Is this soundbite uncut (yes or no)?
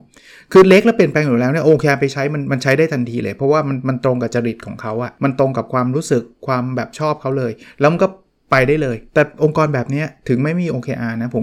no